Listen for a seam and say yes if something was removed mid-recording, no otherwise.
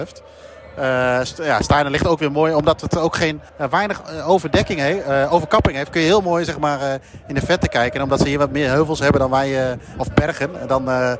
yes